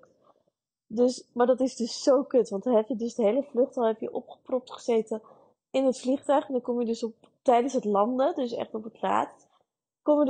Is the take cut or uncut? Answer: uncut